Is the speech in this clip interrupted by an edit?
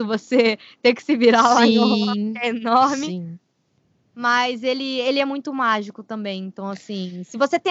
no; 0 cuts

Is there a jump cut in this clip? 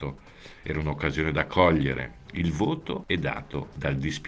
no; 0 cuts

